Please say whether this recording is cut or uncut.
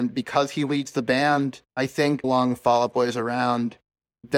cut